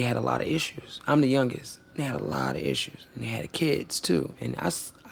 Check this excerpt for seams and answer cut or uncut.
uncut